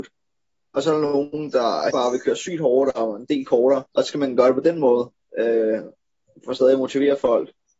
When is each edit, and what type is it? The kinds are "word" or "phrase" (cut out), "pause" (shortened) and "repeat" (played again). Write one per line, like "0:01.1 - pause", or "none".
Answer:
0:01.9 - word
0:03.9 - pause